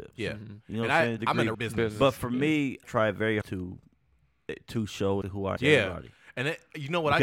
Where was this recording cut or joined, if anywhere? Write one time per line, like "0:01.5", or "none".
0:01.2
0:01.5
0:02.8
0:03.4
0:05.2
0:05.6